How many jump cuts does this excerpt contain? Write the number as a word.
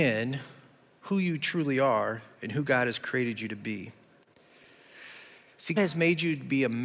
one